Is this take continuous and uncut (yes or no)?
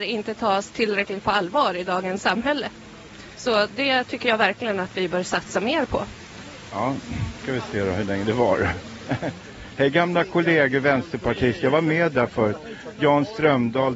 no